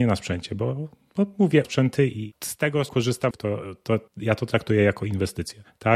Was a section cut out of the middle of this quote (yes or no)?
yes